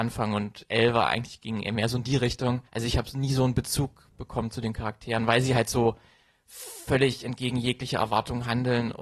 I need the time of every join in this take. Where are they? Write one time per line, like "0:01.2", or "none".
0:02.7